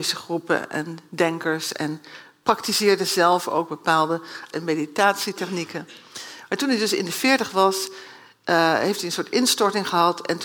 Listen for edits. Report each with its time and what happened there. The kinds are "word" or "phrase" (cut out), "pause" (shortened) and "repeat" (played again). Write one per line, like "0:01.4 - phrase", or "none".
0:04.5 - word